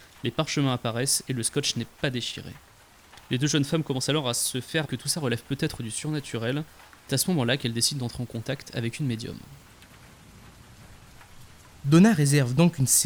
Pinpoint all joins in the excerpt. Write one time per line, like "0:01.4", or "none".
0:04.9
0:07.1